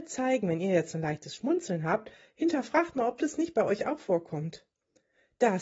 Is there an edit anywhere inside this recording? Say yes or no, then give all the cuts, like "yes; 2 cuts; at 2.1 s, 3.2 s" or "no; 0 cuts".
no; 0 cuts